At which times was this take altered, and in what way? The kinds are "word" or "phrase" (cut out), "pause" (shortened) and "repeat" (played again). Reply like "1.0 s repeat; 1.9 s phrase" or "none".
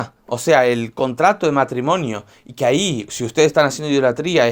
none